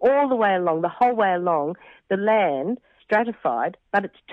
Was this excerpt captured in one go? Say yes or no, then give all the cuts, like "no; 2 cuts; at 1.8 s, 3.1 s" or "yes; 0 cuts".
no; 1 cut; at 3.0 s